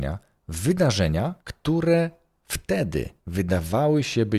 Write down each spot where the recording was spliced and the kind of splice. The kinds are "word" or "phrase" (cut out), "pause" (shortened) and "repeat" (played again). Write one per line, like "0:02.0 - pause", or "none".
0:01.4 - pause
0:03.2 - pause

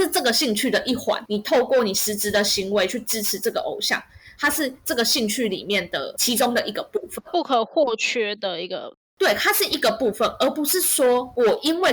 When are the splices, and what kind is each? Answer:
none

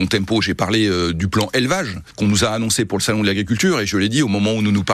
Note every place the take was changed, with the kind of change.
none

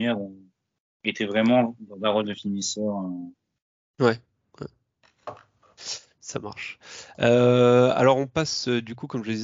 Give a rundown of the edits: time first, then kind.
none

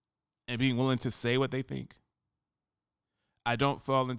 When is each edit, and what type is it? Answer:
none

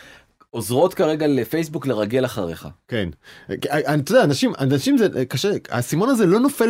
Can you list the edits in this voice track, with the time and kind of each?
none

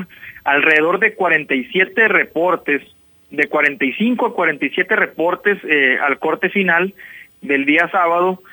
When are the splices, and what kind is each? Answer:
none

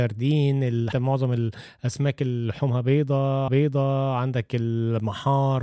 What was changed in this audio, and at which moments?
0:00.9 - word
0:03.5 - repeat

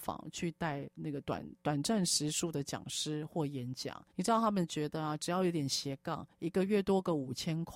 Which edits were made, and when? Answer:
0:01.6 - pause
0:04.1 - pause

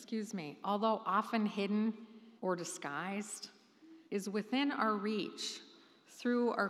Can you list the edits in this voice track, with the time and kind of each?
0:02.4 - pause
0:04.1 - pause

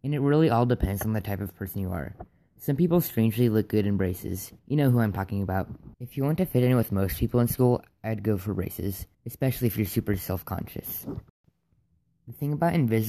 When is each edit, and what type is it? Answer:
0:04.6 - pause
0:05.9 - pause
0:09.1 - pause

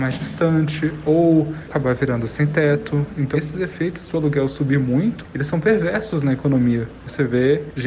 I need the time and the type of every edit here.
0:03.3 - word

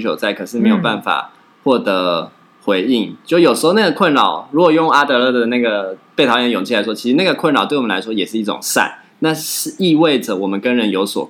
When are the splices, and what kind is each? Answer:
none

